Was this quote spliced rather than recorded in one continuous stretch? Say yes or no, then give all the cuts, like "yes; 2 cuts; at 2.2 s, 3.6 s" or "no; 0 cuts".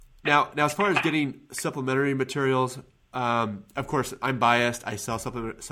no; 0 cuts